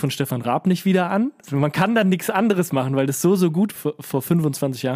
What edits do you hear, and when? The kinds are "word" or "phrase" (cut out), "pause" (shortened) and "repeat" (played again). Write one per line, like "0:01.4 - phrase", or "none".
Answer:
0:03.8 - word